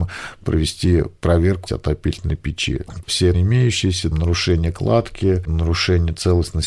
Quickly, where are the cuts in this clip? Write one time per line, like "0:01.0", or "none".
0:01.7
0:03.3
0:04.1